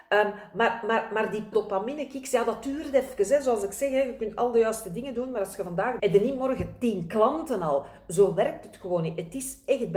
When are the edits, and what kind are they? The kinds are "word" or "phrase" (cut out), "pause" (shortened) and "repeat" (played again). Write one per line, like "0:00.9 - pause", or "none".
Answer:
0:01.5 - word
0:06.0 - word